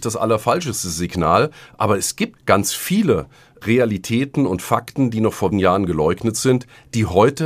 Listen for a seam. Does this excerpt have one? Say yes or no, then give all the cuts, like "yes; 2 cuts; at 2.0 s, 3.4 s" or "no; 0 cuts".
yes; 2 cuts; at 2.4 s, 5.5 s